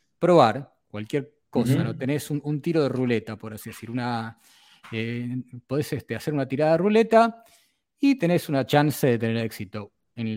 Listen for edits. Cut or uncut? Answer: uncut